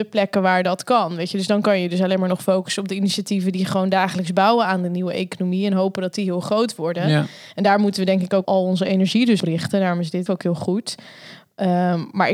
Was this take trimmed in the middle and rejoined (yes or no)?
yes